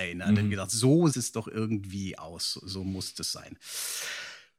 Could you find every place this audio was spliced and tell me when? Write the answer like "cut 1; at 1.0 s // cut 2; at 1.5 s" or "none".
cut 1; at 1.1 s

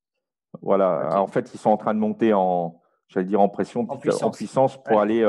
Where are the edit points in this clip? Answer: none

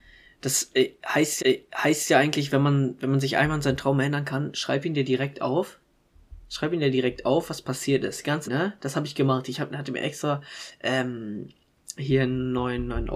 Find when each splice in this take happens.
cut 1; at 1.4 s // cut 2; at 8.5 s

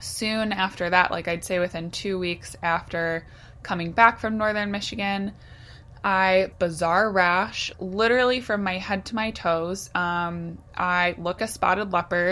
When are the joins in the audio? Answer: cut 1; at 6.5 s // cut 2; at 7.7 s // cut 3; at 11.4 s

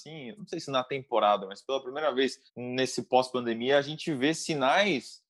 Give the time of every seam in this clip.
cut 1; at 2.5 s

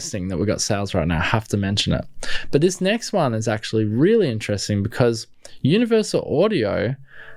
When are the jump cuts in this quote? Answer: none

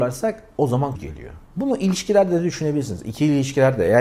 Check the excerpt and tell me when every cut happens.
cut 1; at 0.9 s // cut 2; at 1.4 s

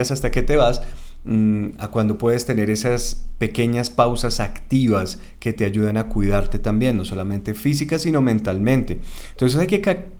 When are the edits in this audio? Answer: none

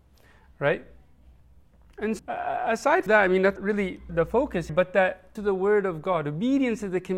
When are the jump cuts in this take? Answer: cut 1; at 2.2 s // cut 2; at 3.1 s // cut 3; at 3.6 s // cut 4; at 4.1 s // cut 5; at 4.7 s // cut 6; at 5.4 s

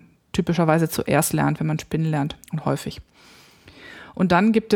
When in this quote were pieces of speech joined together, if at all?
cut 1; at 2.4 s

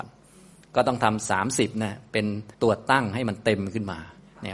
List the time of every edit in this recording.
cut 1; at 2.5 s

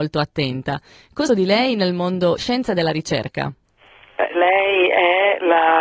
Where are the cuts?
cut 1; at 1.3 s // cut 2; at 2.4 s // cut 3; at 4.3 s

